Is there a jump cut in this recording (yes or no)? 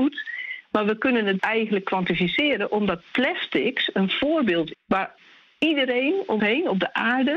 yes